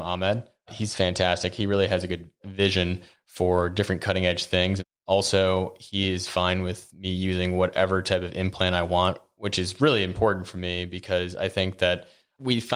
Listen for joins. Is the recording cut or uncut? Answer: uncut